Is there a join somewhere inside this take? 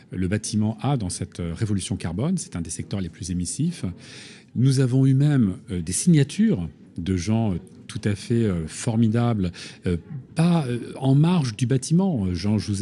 no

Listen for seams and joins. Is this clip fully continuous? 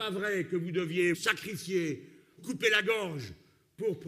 no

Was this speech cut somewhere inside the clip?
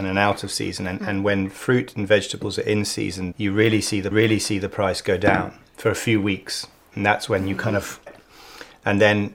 yes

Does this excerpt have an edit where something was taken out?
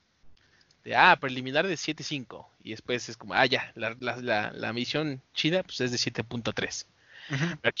yes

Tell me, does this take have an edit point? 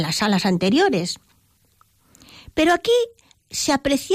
no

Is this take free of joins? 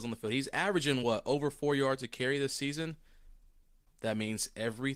yes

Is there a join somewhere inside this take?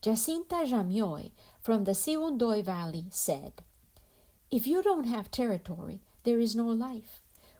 no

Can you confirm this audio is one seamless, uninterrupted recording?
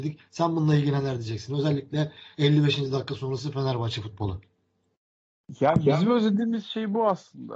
yes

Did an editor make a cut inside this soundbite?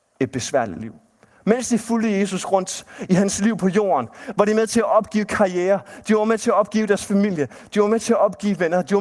no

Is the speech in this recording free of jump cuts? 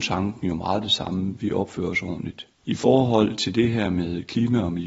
yes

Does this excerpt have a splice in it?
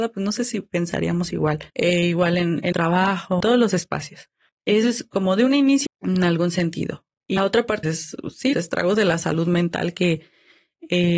yes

